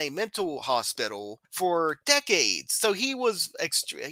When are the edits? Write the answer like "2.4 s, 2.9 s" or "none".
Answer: 1.4 s